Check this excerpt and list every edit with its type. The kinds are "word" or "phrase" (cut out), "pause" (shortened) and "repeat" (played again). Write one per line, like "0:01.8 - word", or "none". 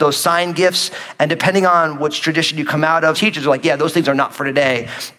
0:02.2 - word
0:03.1 - word